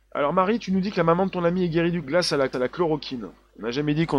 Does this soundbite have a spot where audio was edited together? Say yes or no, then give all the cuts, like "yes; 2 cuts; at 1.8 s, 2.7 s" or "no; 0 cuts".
yes; 2 cuts; at 2.0 s, 2.5 s